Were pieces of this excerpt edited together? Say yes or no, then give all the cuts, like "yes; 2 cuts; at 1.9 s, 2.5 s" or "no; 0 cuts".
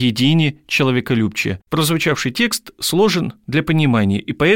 yes; 1 cut; at 1.6 s